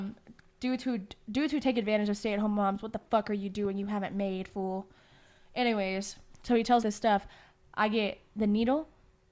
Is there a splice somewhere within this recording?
yes; 1 cut; at 6.8 s

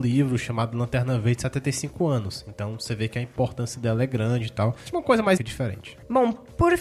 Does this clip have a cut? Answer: yes; 1 cut; at 5.4 s

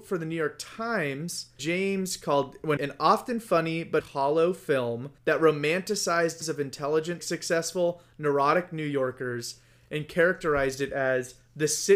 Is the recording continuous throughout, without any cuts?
no; 6 cuts; at 1.6 s, 2.8 s, 4.0 s, 5.2 s, 6.4 s, 7.2 s

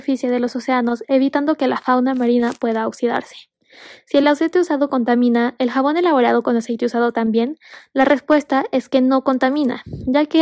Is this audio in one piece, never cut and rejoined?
yes; 0 cuts

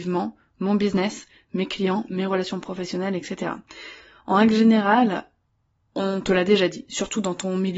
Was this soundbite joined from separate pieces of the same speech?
no; 0 cuts

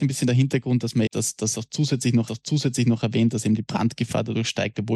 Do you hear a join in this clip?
yes; 2 cuts; at 1.1 s, 2.3 s

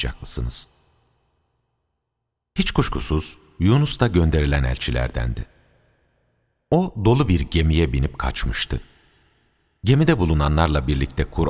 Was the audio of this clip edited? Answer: no; 0 cuts

